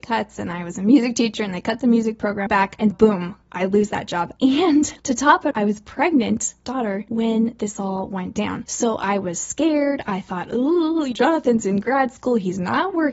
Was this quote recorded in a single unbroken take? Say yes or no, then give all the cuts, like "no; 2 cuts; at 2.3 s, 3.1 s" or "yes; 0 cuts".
no; 7 cuts; at 2.5 s, 2.9 s, 3.4 s, 5.0 s, 5.5 s, 6.6 s, 11.1 s